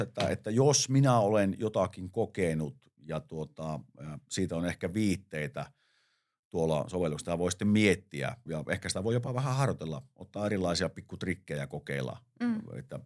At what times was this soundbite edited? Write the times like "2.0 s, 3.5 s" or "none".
8.5 s